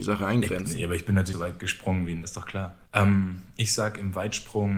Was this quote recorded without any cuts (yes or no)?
no